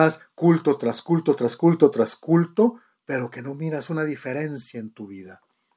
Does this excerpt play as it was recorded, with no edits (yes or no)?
yes